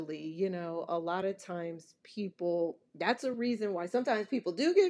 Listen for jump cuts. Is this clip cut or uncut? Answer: uncut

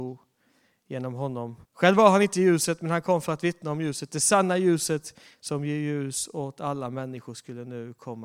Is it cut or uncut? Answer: cut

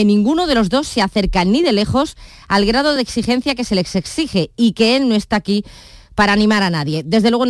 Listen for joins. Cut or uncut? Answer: uncut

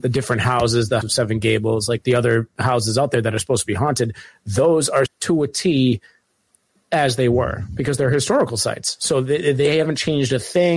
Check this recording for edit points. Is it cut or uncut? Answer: cut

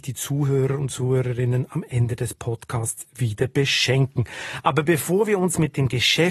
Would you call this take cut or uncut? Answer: uncut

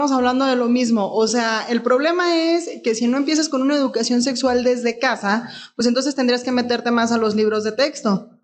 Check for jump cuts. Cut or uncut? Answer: uncut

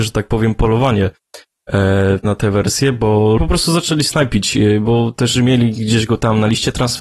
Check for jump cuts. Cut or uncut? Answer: cut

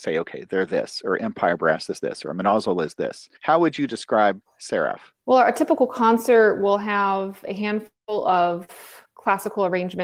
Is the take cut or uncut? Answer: cut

